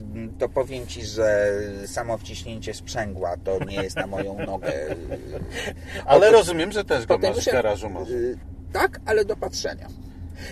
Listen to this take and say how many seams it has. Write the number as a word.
zero